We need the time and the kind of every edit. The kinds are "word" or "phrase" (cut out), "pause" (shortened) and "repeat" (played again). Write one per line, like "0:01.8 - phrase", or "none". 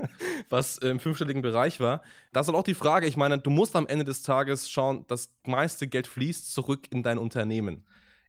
none

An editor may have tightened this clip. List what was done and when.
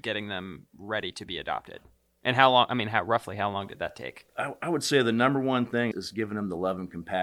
0:02.0 - pause
0:05.9 - word

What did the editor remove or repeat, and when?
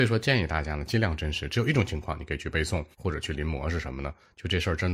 0:02.9 - pause

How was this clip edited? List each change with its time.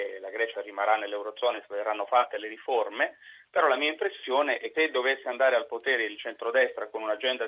0:04.7 - word

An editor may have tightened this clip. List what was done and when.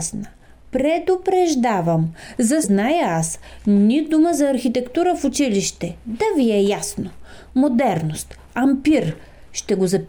0:02.6 - phrase
0:08.5 - word

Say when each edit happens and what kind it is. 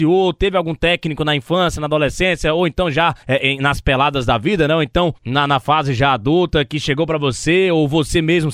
0:03.2 - pause
0:05.2 - pause

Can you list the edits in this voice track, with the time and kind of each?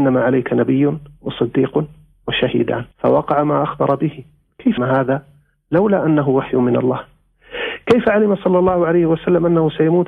0:02.9 - pause
0:04.8 - word

